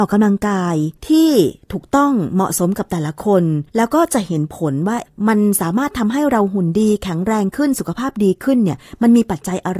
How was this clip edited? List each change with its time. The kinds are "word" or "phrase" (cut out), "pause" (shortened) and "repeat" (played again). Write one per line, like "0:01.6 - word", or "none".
0:01.0 - pause
0:03.7 - pause